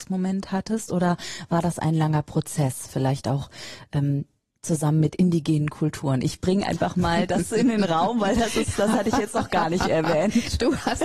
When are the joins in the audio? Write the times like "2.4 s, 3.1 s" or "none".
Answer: none